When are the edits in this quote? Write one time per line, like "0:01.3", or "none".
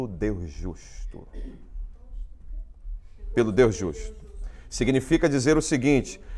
none